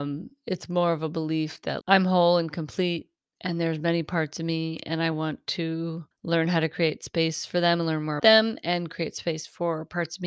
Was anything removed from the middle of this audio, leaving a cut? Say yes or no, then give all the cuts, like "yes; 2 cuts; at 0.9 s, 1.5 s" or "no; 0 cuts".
yes; 4 cuts; at 1.8 s, 3.2 s, 6.1 s, 8.2 s